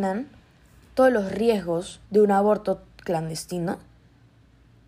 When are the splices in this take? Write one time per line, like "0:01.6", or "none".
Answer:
0:02.1